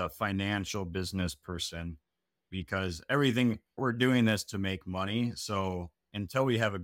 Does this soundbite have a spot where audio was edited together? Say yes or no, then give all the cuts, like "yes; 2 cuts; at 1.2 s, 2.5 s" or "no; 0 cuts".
no; 0 cuts